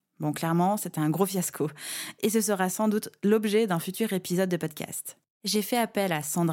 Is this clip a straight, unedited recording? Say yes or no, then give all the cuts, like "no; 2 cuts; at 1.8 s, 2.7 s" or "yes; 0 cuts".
yes; 0 cuts